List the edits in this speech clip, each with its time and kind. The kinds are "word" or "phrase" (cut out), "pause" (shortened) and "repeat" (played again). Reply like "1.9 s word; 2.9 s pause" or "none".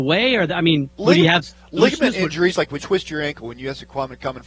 0.9 s pause; 2.8 s word